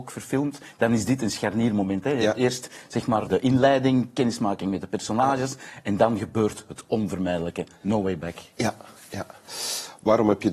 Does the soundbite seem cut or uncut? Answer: cut